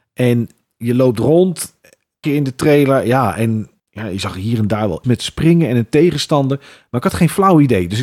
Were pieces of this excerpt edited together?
yes; 3 cuts; at 2.2 s, 3.8 s, 5.0 s

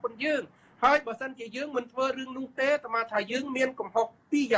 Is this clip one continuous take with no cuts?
yes; 0 cuts

